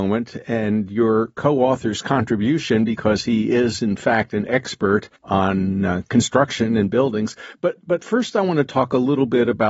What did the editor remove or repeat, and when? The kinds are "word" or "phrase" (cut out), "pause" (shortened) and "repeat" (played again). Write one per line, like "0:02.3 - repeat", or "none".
0:05.2 - pause